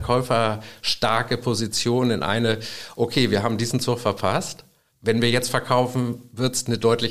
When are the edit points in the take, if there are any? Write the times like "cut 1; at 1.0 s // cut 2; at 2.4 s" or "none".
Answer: cut 1; at 4.9 s

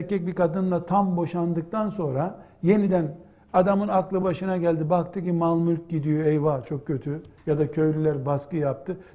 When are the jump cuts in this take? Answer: none

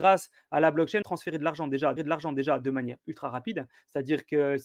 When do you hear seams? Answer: cut 1; at 1.0 s // cut 2; at 2.0 s

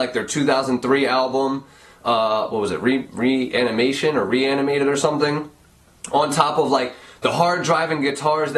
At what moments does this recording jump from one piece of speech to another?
none

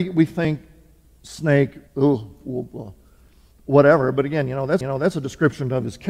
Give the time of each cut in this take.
cut 1; at 1.9 s // cut 2; at 4.8 s

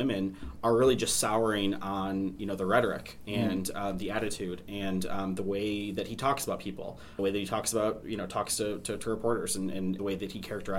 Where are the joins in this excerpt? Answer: none

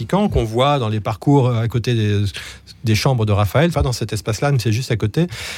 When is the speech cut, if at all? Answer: cut 1; at 3.7 s

